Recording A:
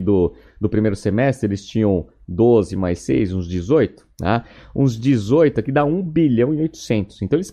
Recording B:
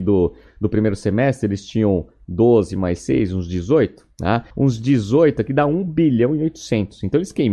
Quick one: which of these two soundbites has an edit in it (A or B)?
B